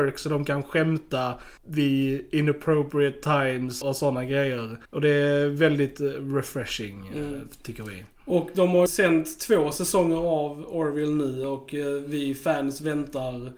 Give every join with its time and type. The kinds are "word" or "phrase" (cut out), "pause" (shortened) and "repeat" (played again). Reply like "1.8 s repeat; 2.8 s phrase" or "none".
1.6 s pause; 3.8 s word; 4.9 s pause; 8.9 s word